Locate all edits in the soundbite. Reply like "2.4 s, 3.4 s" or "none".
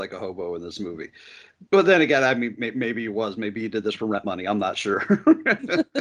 1.7 s